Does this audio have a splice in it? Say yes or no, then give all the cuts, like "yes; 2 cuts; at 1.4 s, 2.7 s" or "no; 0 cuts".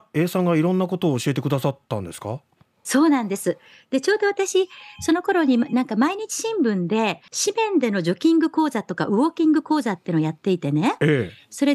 no; 0 cuts